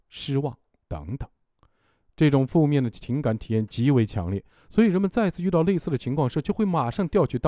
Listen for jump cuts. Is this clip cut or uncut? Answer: uncut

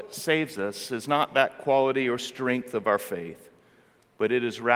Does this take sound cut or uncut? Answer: uncut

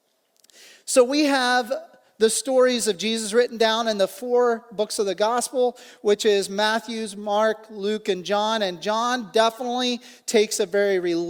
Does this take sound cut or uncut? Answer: uncut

